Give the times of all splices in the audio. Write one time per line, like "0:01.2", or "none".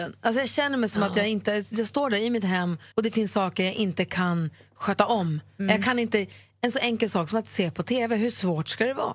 0:02.9